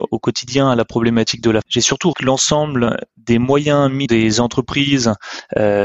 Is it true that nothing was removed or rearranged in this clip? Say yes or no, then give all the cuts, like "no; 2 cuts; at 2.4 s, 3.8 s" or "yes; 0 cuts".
no; 3 cuts; at 1.6 s, 2.1 s, 4.1 s